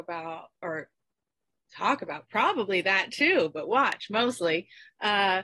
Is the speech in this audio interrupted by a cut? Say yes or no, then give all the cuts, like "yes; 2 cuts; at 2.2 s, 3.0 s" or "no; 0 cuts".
no; 0 cuts